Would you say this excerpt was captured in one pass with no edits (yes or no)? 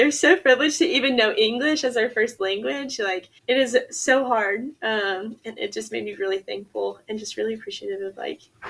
no